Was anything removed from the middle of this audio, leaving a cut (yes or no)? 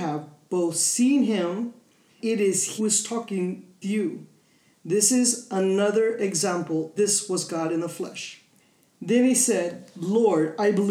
yes